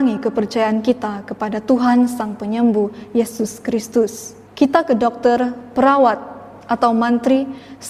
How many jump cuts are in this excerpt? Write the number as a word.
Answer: one